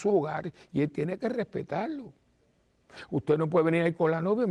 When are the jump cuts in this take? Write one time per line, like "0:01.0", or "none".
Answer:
none